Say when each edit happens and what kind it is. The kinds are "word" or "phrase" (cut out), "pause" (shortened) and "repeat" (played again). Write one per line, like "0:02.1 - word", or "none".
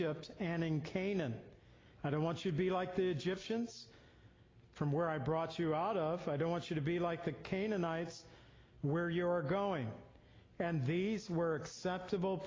none